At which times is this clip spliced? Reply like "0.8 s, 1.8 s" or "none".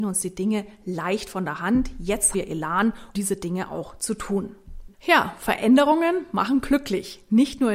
2.3 s, 3.1 s, 4.9 s

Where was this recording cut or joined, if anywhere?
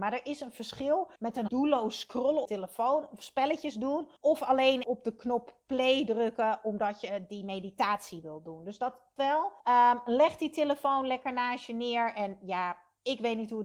1.2 s, 1.5 s, 2.5 s, 4.2 s, 4.8 s, 9.2 s, 9.6 s

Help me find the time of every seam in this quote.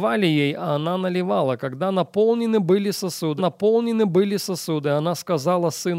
3.4 s

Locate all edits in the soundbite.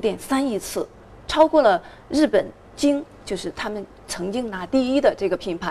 none

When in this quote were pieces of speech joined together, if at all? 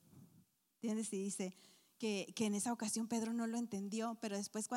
none

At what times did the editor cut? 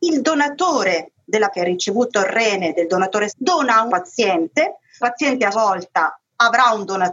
1.5 s, 3.3 s, 3.9 s, 5.0 s, 5.5 s

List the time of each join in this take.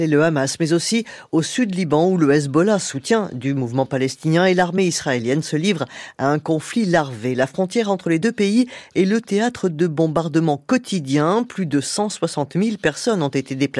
none

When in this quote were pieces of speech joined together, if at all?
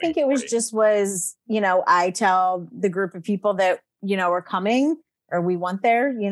none

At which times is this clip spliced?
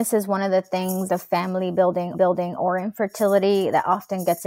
1.1 s, 2.1 s

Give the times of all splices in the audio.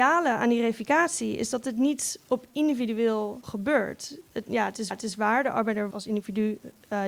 3.4 s, 4.9 s, 5.9 s

